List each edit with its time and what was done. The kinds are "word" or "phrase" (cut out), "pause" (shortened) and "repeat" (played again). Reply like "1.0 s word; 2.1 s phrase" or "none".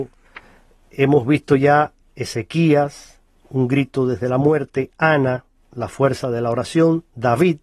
none